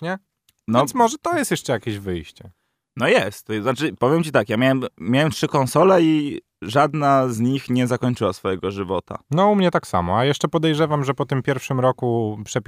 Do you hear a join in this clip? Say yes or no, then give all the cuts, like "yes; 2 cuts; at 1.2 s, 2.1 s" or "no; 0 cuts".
no; 0 cuts